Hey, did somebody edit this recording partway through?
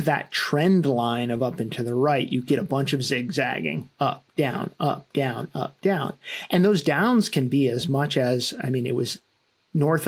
no; 0 cuts

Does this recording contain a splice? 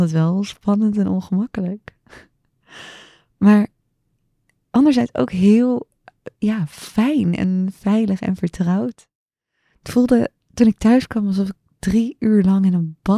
no; 0 cuts

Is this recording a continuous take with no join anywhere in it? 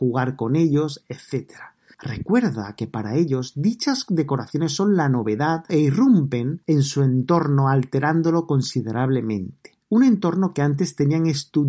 no; 1 cut; at 9.8 s

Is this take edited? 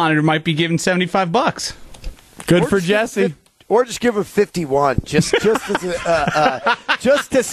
no; 0 cuts

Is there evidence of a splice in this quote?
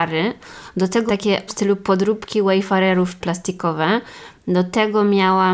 yes; 3 cuts; at 1.1 s, 1.5 s, 3.2 s

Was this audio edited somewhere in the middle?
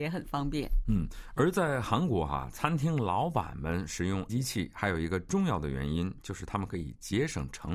yes; 1 cut; at 4.3 s

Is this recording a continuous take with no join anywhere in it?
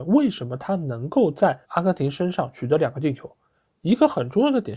no; 1 cut; at 1.6 s

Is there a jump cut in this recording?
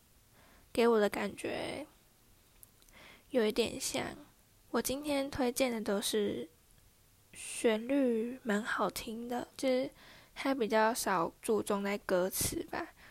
yes; 4 cuts; at 4.4 s, 6.9 s, 9.5 s, 11.4 s

